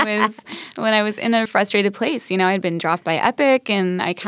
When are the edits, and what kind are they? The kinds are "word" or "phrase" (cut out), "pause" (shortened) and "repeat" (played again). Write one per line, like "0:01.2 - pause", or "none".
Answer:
0:01.5 - word